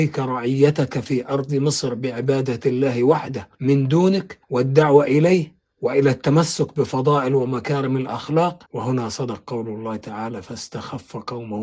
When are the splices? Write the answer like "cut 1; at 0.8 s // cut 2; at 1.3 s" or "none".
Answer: cut 1; at 3.5 s // cut 2; at 4.4 s // cut 3; at 8.7 s